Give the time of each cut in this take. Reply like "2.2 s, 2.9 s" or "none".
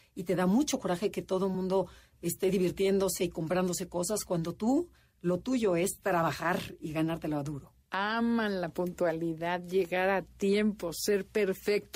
none